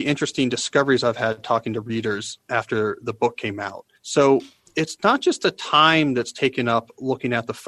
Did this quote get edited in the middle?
yes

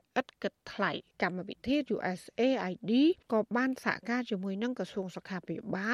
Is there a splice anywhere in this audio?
yes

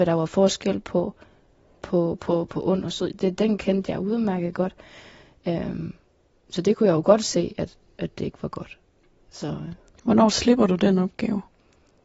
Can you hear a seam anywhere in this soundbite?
no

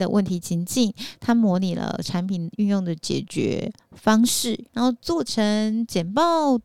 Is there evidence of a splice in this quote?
yes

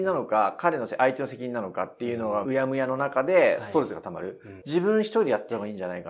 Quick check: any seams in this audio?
yes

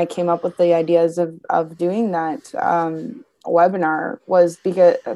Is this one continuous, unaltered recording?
yes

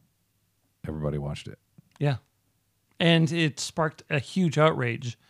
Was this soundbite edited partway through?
no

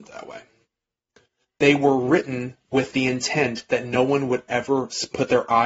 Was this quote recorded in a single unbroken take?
yes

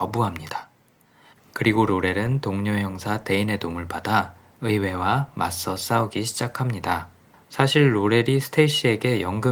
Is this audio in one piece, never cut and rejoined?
yes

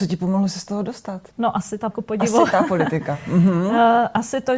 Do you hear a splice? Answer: yes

